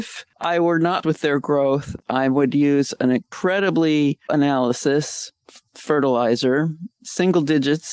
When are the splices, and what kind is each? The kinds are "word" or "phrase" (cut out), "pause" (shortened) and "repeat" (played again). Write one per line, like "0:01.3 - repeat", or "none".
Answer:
0:01.0 - word
0:04.3 - word